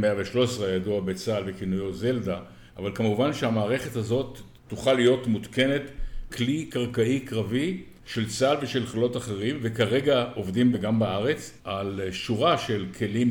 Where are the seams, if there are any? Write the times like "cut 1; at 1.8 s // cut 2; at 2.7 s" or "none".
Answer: cut 1; at 2.7 s // cut 2; at 4.6 s // cut 3; at 6.3 s // cut 4; at 8.0 s // cut 5; at 10.7 s // cut 6; at 11.6 s